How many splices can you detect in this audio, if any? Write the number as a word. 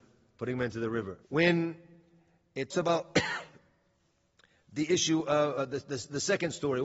two